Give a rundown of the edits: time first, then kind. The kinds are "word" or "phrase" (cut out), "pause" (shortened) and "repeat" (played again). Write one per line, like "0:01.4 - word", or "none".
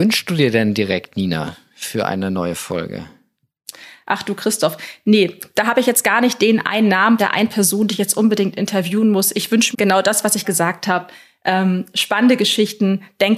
0:07.2 - word
0:09.7 - word
0:10.4 - word